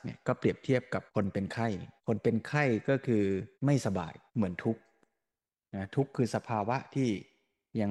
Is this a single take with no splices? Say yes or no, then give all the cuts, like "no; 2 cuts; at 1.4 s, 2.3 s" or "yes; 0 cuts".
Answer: no; 4 cuts; at 1.1 s, 2.0 s, 3.5 s, 4.3 s